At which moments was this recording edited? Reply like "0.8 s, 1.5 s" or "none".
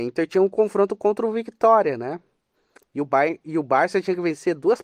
none